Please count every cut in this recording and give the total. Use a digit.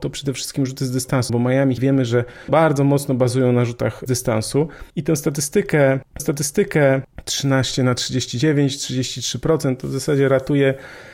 6